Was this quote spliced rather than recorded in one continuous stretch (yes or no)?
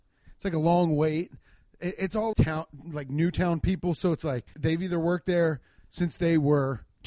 yes